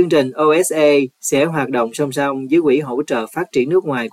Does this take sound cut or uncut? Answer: uncut